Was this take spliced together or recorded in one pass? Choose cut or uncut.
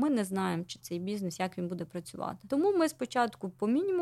uncut